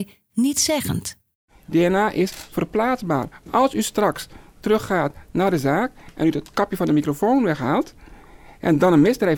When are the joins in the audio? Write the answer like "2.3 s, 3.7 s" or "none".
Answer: none